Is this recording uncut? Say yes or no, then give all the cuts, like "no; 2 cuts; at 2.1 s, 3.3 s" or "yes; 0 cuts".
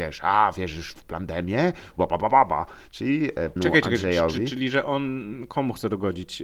no; 2 cuts; at 1.0 s, 3.6 s